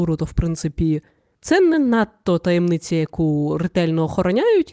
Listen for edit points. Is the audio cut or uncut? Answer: uncut